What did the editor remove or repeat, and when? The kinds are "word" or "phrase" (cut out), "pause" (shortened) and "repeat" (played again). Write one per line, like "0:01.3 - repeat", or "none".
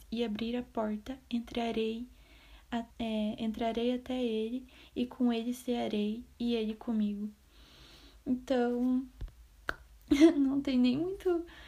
0:02.9 - pause